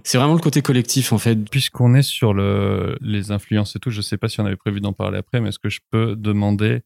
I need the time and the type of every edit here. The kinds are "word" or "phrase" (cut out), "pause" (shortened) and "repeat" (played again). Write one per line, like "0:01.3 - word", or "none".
none